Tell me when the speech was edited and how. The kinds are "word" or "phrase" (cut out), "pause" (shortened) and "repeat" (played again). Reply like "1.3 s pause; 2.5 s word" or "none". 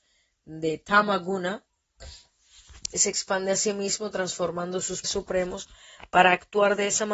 2.9 s word; 5.0 s word